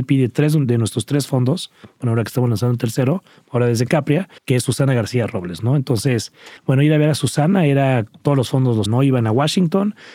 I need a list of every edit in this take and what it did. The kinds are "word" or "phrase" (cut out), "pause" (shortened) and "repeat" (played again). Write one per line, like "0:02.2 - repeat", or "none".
0:04.4 - pause
0:06.6 - pause
0:08.9 - word